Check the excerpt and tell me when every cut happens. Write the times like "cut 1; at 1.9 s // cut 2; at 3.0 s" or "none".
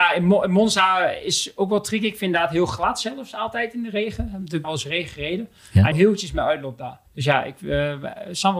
cut 1; at 4.6 s // cut 2; at 5.9 s // cut 3; at 7.1 s